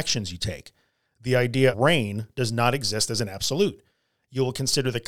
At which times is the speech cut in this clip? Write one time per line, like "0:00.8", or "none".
0:01.7